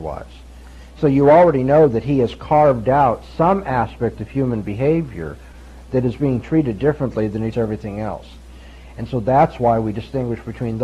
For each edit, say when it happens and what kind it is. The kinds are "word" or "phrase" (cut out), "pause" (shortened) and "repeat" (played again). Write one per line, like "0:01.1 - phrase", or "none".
0:07.5 - word